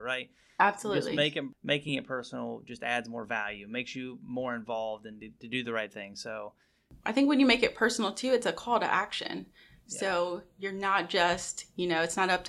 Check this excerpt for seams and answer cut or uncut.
uncut